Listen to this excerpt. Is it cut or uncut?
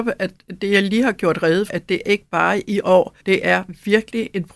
cut